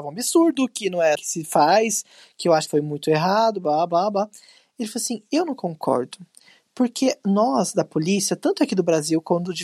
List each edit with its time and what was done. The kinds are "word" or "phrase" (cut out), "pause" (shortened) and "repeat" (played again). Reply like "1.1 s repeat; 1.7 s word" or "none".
1.2 s word; 2.7 s phrase